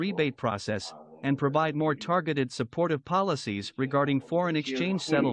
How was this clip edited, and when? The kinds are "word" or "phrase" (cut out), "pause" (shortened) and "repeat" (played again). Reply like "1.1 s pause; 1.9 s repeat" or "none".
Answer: none

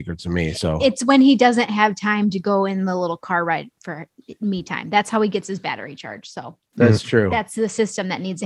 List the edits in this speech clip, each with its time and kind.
none

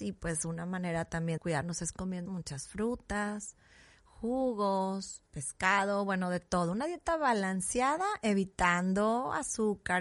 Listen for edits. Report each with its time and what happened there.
1.4 s word; 2.3 s phrase; 5.3 s pause

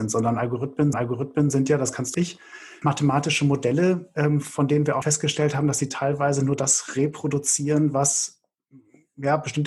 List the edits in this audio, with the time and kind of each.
0.9 s repeat; 2.1 s phrase; 2.8 s word; 5.0 s word

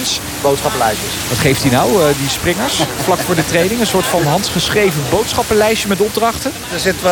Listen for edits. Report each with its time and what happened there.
none

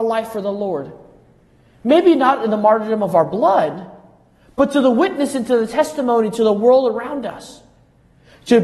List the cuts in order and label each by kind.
none

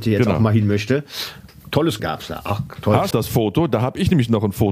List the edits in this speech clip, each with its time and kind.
2.0 s word; 3.1 s phrase

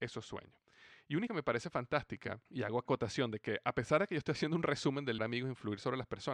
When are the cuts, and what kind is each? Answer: 1.3 s word; 2.5 s pause; 2.9 s word; 5.2 s phrase

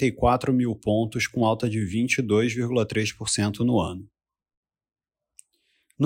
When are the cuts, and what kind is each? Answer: none

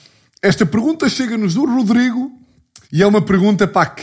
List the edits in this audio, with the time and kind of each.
2.8 s pause

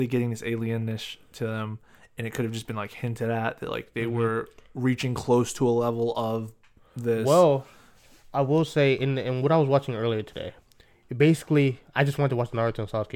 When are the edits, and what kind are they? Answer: none

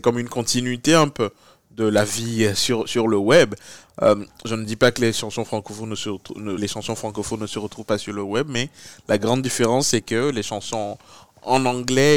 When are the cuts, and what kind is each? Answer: 6.6 s word

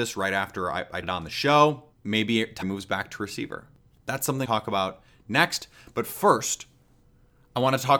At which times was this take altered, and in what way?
1.0 s phrase; 1.9 s pause; 2.6 s word; 4.5 s phrase

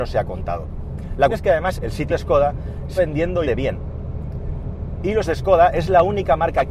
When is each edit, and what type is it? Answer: 1.3 s word; 1.8 s word; 2.1 s word; 3.0 s word; 3.4 s word; 5.3 s word

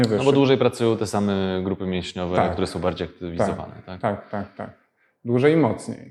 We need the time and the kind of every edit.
none

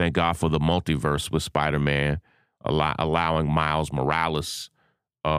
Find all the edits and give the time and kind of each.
none

